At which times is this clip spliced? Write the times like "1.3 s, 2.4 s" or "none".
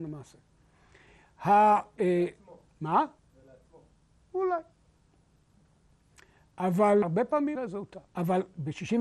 3.2 s, 7.0 s, 7.6 s, 8.1 s